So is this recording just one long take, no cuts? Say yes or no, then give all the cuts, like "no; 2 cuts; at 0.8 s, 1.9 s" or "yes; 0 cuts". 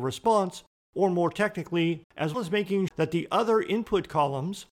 no; 3 cuts; at 2.0 s, 2.3 s, 2.9 s